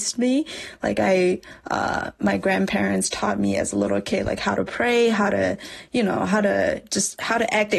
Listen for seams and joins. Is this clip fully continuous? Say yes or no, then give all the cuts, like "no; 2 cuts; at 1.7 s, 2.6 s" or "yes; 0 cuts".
yes; 0 cuts